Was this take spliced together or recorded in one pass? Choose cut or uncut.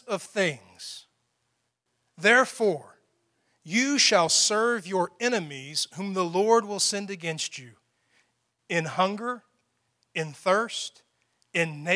uncut